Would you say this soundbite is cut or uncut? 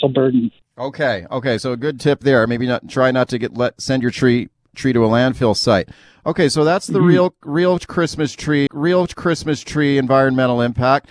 cut